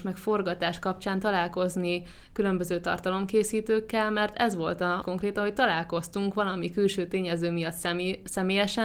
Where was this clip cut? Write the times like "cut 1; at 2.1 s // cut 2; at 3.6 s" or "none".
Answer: cut 1; at 5.0 s